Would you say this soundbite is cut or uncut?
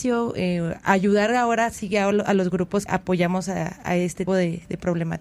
cut